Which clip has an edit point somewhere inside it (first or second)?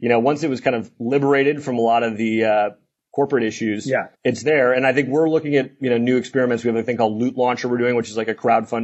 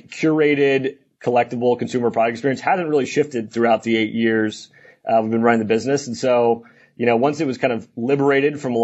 first